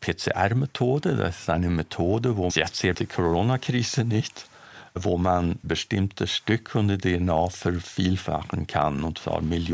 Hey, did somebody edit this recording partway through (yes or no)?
yes